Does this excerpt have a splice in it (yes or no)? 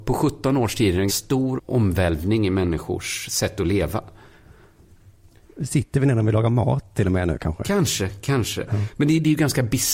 yes